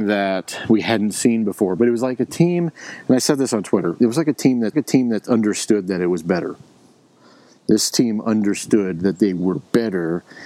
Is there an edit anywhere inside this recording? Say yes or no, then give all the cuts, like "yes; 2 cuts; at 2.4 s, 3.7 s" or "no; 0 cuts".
yes; 1 cut; at 4.7 s